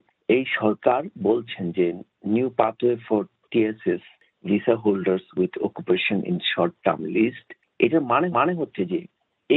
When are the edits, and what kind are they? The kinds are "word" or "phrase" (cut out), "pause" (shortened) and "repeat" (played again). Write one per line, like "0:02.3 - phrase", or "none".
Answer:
0:08.3 - repeat